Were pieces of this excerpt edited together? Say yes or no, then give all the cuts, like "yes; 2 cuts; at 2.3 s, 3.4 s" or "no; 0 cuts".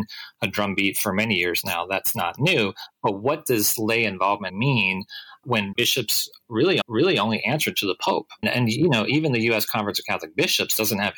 yes; 4 cuts; at 4.5 s, 5.7 s, 6.8 s, 8.4 s